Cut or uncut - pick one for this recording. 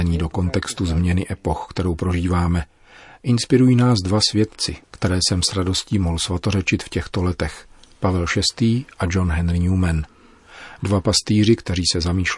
uncut